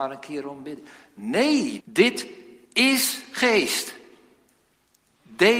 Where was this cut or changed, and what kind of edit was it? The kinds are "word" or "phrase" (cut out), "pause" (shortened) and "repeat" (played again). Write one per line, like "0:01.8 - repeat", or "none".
0:01.8 - word
0:02.6 - pause